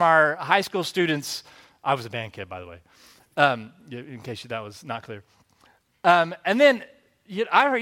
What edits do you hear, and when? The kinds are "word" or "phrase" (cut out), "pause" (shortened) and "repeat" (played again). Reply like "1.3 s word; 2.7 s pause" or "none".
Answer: none

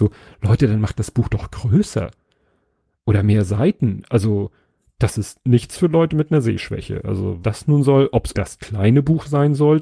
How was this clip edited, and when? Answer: 7.4 s word; 8.3 s word

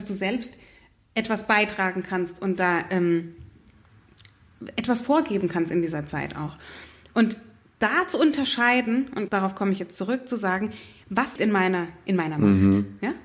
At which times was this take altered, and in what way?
9.3 s word; 11.4 s word

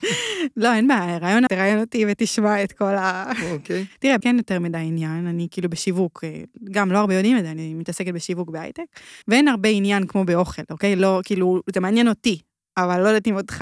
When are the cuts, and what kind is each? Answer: 1.5 s word; 4.2 s word; 9.2 s pause

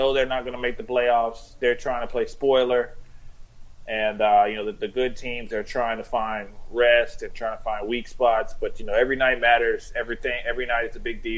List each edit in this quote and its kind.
none

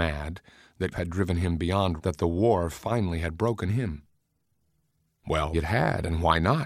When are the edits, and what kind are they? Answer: 0.9 s word; 2.0 s word; 3.7 s word; 5.5 s word

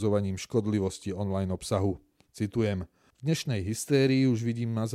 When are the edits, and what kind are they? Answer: none

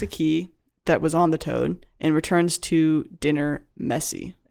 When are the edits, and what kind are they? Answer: none

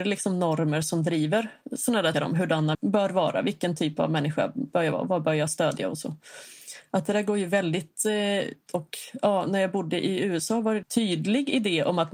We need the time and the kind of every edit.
2.1 s word; 2.7 s word; 8.7 s word; 10.8 s word

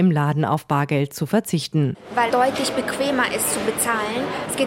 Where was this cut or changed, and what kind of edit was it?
2.3 s word

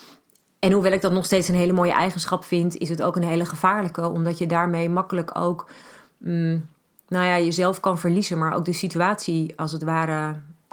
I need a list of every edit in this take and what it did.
none

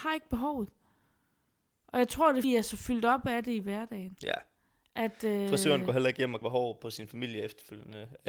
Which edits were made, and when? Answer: 2.4 s word; 6.4 s word

